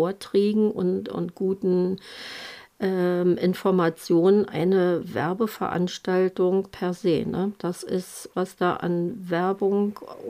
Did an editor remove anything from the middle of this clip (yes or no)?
yes